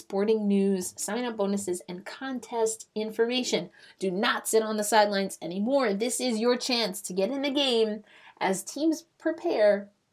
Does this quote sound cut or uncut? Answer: uncut